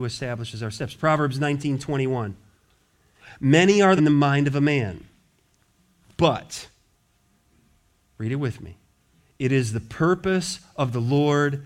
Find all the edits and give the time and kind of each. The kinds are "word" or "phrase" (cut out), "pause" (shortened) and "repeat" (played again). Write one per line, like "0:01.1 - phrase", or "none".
0:04.0 - phrase

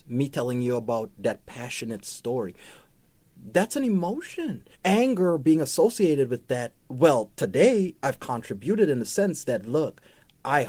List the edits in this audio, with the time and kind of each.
0:04.7 - pause
0:06.8 - pause

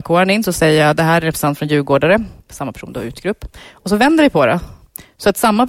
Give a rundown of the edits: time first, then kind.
0:02.4 - pause

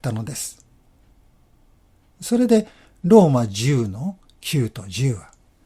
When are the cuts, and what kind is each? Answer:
none

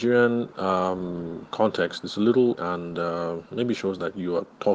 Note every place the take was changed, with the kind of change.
0:02.6 - phrase

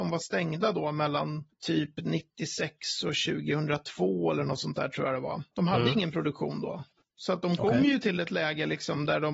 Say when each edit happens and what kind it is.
none

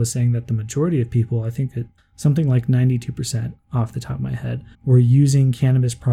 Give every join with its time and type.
0:02.0 - pause
0:04.7 - pause

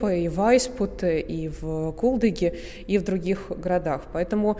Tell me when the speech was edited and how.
none

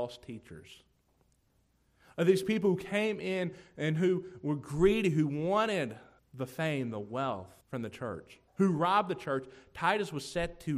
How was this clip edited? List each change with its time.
0:06.2 - pause
0:07.6 - pause
0:08.5 - pause

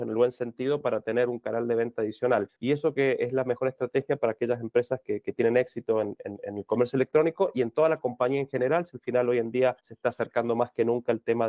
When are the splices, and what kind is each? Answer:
0:02.5 - pause
0:02.9 - word
0:05.0 - word
0:09.8 - pause

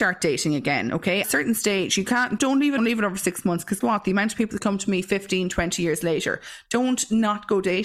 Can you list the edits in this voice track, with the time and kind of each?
0:01.2 - phrase
0:02.4 - word
0:02.8 - phrase
0:03.8 - word

